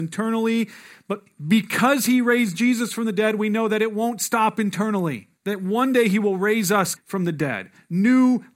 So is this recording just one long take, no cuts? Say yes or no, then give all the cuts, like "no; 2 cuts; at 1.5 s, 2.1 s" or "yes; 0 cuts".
no; 2 cuts; at 5.4 s, 7.0 s